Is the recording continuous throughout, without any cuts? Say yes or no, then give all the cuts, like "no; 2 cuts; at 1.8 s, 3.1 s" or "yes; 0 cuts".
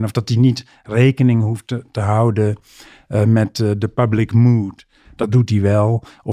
yes; 0 cuts